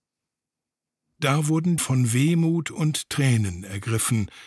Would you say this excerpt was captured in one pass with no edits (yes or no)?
no